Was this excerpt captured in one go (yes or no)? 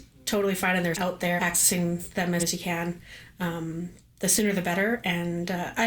no